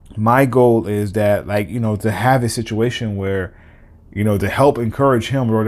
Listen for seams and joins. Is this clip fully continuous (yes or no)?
yes